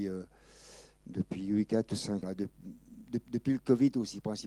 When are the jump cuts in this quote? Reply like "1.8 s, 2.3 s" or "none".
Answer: 2.2 s, 3.2 s